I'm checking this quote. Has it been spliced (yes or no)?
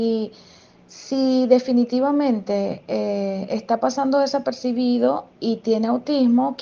yes